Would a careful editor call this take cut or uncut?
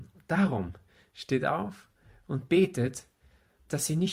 uncut